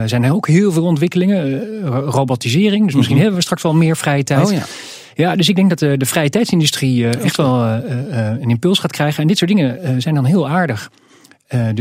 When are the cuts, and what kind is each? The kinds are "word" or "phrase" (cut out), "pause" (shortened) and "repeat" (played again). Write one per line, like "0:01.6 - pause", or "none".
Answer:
none